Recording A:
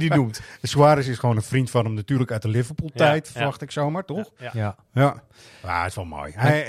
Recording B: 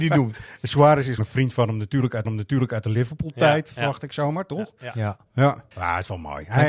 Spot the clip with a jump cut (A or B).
B